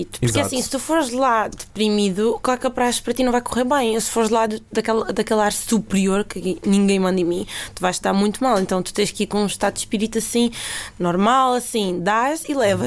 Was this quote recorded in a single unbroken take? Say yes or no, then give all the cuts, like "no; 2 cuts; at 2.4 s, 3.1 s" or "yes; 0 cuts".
yes; 0 cuts